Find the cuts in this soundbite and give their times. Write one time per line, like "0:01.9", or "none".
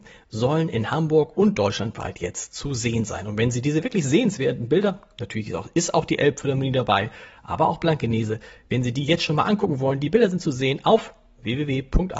none